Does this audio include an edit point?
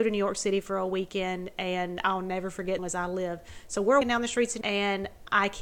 yes; 3 cuts; at 2.8 s, 4.0 s, 4.6 s

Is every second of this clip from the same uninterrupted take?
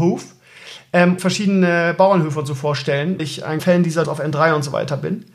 no; 4 cuts; at 1.2 s, 3.2 s, 3.6 s, 4.0 s

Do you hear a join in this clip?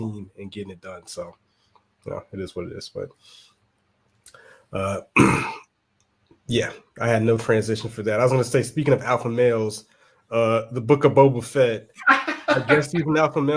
no; 0 cuts

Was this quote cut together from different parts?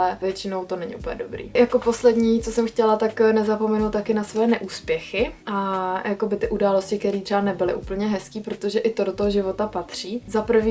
yes; 1 cut; at 5.4 s

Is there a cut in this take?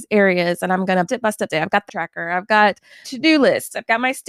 yes; 4 cuts; at 1.1 s, 1.5 s, 1.9 s, 3.0 s

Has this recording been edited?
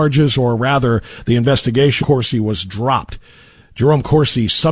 yes; 1 cut; at 2.0 s

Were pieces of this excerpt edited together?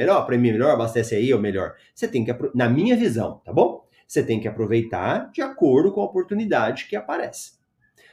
no; 0 cuts

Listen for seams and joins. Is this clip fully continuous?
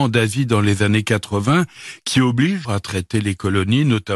no; 1 cut; at 2.6 s

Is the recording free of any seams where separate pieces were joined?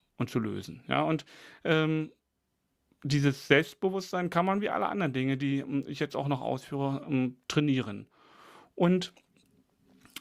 yes; 0 cuts

